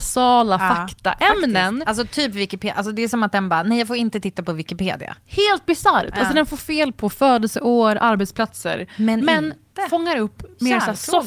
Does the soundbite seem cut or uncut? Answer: uncut